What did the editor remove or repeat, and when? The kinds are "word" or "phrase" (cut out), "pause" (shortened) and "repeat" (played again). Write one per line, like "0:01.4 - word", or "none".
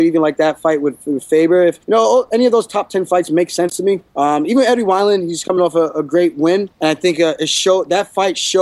0:01.8 - pause
0:04.1 - pause
0:06.7 - pause